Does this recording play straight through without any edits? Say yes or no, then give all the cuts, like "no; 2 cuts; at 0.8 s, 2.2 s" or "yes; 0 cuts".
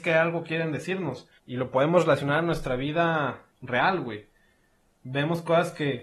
no; 2 cuts; at 1.4 s, 3.5 s